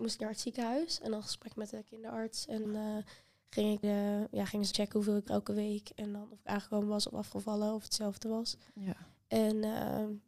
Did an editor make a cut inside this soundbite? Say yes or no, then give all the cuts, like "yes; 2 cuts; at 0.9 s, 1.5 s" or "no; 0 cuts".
yes; 4 cuts; at 2.7 s, 3.8 s, 4.7 s, 5.3 s